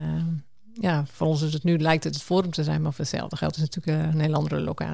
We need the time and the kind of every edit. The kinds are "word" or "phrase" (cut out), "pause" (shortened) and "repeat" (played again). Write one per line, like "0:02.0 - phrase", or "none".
none

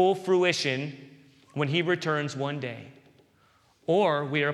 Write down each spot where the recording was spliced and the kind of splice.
none

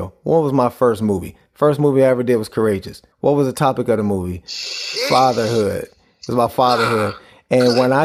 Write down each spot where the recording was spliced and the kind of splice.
0:03.1 - pause

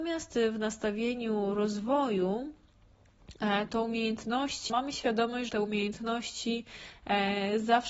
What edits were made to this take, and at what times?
0:04.7 - word
0:05.5 - word

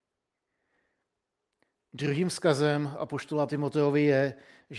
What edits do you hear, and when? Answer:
0:03.5 - word

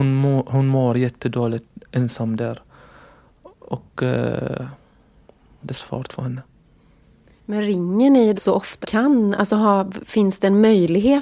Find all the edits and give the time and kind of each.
0:05.6 - word
0:08.4 - word
0:08.8 - word

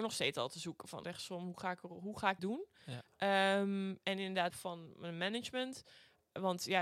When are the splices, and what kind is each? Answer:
0:01.0 - word
0:02.4 - word
0:04.5 - phrase

